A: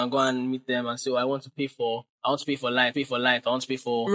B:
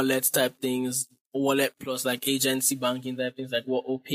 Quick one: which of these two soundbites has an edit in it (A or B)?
A